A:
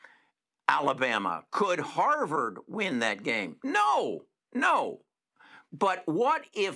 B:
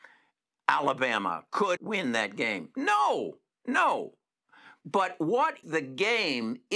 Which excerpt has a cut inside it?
B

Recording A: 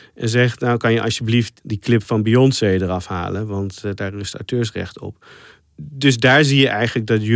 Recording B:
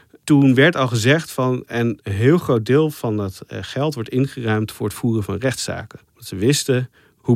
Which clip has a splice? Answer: B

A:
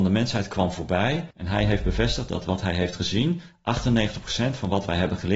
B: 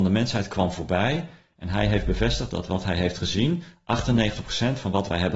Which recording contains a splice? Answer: A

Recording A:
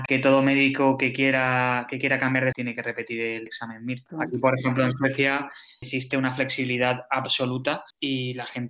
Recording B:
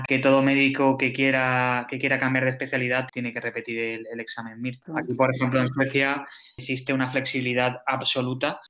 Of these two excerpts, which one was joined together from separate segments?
A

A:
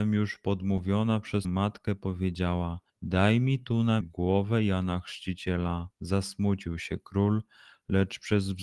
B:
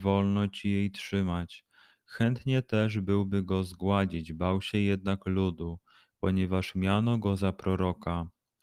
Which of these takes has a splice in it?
A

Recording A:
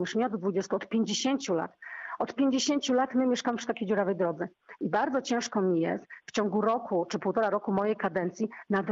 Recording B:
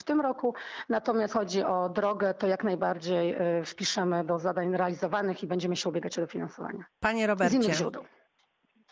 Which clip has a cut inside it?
B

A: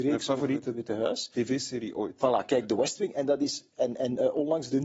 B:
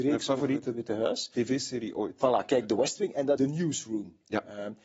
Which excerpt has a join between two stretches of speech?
B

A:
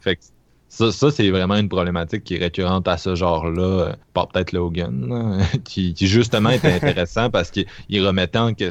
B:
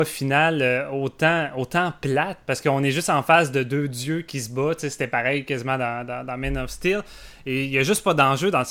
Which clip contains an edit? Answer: A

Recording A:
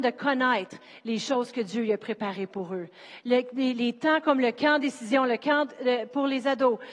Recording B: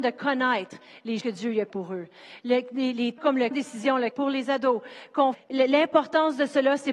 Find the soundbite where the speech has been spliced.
B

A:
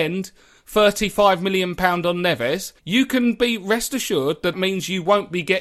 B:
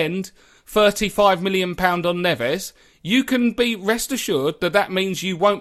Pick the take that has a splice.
A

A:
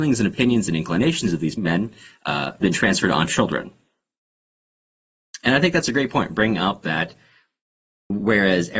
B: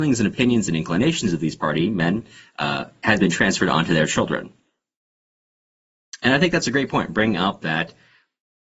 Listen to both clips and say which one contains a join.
A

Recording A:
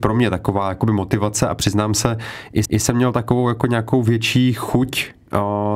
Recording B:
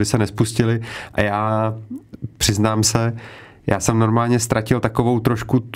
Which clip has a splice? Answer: A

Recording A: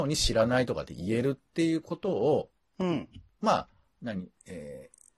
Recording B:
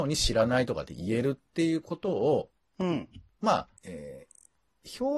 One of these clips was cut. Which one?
B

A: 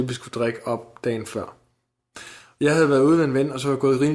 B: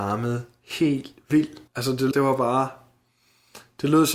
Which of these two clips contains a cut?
B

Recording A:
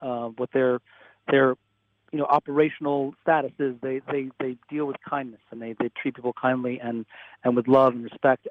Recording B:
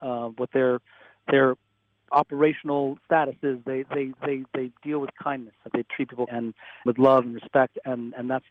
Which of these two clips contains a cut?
B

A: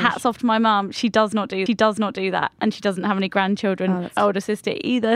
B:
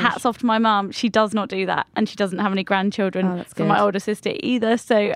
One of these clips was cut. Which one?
A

